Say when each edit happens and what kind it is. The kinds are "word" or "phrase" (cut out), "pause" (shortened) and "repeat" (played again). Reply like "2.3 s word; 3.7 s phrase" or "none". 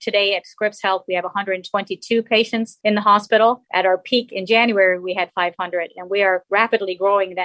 none